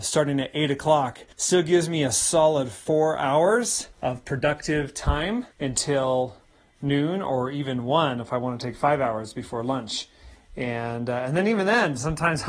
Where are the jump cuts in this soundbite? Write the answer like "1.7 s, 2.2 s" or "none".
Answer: 1.3 s, 3.9 s, 5.5 s